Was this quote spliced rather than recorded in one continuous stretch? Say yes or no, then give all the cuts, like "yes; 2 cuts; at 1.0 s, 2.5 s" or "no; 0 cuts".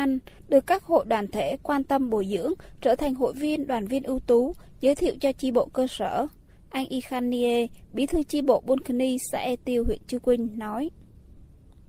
no; 0 cuts